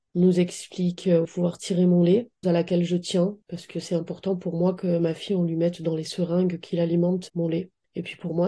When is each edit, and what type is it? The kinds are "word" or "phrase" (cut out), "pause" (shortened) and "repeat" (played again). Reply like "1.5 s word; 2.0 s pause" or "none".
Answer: 1.2 s phrase; 2.4 s word; 3.4 s pause; 7.3 s word